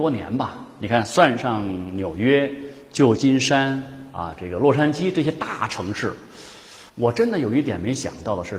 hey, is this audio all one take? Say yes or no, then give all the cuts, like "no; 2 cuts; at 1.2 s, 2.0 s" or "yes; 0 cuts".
no; 1 cut; at 6.9 s